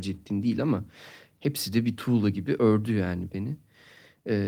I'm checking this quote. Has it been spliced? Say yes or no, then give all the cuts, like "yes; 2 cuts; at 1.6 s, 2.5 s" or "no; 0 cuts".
no; 0 cuts